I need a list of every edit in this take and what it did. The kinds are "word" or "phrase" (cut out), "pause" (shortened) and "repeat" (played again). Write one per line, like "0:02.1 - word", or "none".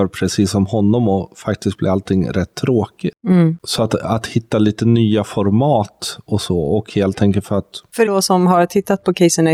0:08.1 - word